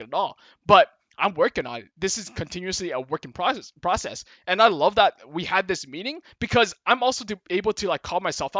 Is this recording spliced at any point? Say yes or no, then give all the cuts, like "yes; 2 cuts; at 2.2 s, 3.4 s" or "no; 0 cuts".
no; 0 cuts